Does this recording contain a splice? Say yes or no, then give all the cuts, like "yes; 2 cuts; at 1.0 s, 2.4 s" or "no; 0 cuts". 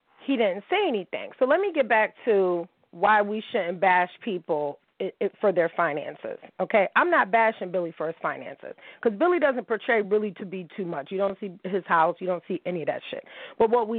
no; 0 cuts